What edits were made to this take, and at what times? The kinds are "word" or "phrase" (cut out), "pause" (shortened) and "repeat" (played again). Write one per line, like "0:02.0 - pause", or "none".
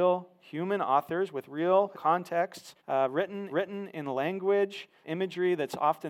0:01.9 - word
0:02.8 - pause
0:03.5 - repeat
0:05.0 - word